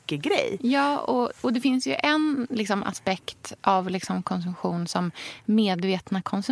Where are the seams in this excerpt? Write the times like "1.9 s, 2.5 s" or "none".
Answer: none